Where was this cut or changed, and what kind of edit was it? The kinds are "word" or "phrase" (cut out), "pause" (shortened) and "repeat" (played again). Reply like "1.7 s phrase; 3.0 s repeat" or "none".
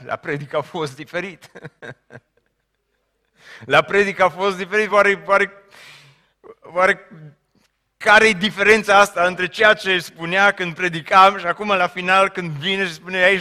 none